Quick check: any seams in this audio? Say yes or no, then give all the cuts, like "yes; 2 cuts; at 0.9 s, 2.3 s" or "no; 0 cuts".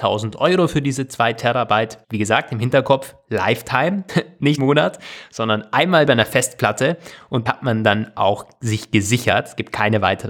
yes; 5 cuts; at 2.0 s, 4.1 s, 4.6 s, 6.1 s, 7.5 s